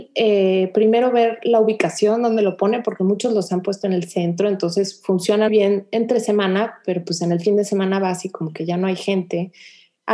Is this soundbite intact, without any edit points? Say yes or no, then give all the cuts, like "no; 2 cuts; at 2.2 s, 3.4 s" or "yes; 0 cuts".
no; 1 cut; at 5.5 s